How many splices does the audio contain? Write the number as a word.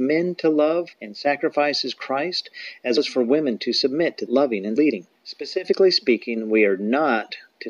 five